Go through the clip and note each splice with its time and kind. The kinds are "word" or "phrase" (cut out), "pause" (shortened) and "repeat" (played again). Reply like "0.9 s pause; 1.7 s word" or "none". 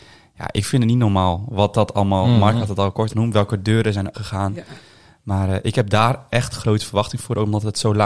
3.1 s word; 4.1 s word